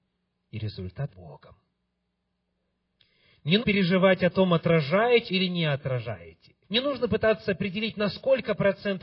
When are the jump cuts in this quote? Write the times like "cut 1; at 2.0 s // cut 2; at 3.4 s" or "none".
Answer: cut 1; at 1.1 s // cut 2; at 3.6 s // cut 3; at 5.3 s // cut 4; at 6.6 s